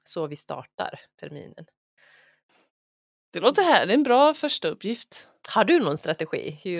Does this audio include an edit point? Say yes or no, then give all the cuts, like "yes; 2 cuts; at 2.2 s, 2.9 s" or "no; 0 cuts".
no; 0 cuts